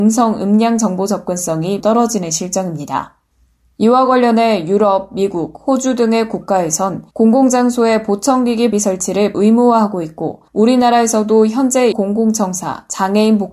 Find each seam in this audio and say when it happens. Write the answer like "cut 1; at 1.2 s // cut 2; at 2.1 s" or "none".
cut 1; at 1.8 s // cut 2; at 3.3 s // cut 3; at 7.1 s // cut 4; at 8.7 s // cut 5; at 9.3 s // cut 6; at 10.5 s // cut 7; at 11.9 s